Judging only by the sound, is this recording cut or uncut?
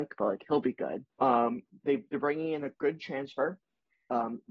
cut